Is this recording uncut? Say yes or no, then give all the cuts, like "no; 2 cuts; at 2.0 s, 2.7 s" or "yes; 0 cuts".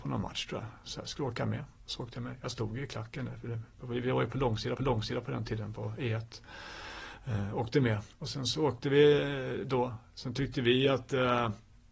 no; 2 cuts; at 4.8 s, 8.1 s